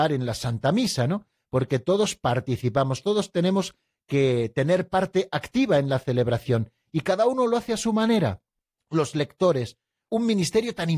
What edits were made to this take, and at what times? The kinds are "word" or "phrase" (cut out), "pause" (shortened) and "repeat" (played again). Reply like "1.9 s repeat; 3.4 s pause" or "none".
none

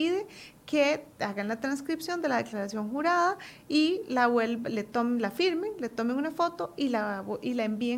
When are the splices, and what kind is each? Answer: none

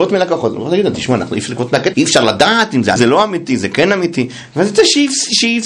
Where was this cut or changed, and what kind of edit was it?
1.9 s word; 3.0 s word

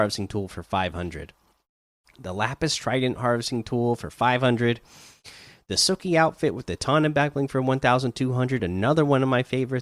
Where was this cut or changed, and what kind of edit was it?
none

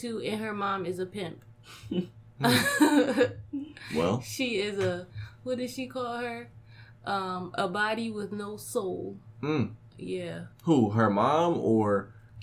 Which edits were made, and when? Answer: 10.5 s pause

